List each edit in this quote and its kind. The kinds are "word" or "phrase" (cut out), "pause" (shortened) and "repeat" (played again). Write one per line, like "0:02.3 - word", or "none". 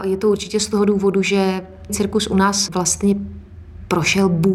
0:01.9 - phrase